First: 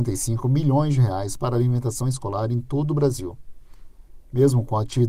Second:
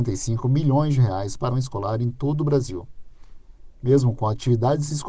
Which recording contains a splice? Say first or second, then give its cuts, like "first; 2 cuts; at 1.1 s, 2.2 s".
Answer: second; 1 cut; at 1.5 s